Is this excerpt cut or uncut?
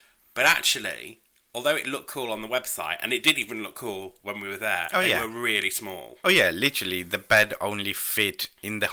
uncut